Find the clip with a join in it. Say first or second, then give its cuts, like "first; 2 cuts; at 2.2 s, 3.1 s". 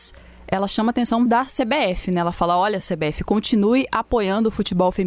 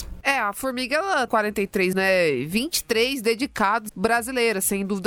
second; 3 cuts; at 1.3 s, 1.9 s, 3.9 s